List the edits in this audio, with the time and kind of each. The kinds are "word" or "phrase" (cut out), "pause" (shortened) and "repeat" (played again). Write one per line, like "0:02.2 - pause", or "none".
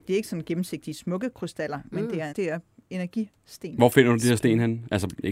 0:02.3 - word